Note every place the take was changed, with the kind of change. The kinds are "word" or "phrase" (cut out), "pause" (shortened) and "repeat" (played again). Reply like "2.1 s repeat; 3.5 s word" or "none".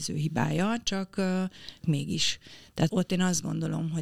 1.8 s word; 2.9 s word